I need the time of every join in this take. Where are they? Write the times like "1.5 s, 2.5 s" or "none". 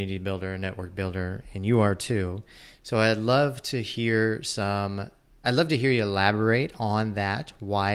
none